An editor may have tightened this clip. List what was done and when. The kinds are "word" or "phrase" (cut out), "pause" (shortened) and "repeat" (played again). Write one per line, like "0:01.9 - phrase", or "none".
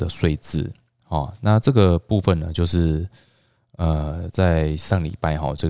none